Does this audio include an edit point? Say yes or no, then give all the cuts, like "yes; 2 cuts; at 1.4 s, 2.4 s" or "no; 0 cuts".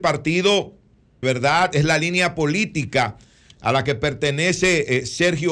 yes; 1 cut; at 1.2 s